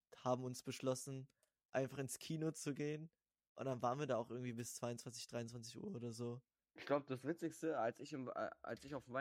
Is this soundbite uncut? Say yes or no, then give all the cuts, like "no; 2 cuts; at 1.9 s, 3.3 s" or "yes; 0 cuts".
yes; 0 cuts